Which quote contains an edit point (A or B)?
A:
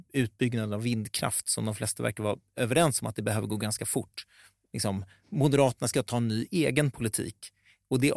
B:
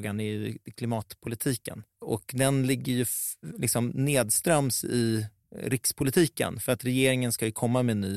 B